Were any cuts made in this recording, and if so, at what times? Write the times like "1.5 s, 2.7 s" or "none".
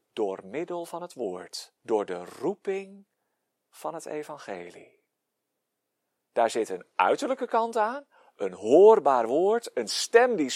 1.8 s